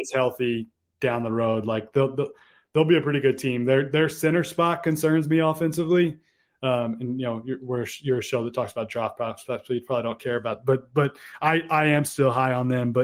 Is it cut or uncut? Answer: uncut